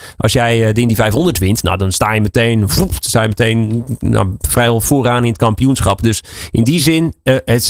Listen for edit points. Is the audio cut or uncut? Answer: uncut